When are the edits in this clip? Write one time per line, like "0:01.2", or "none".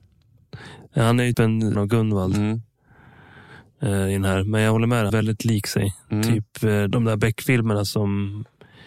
0:01.3
0:01.7
0:05.1
0:06.9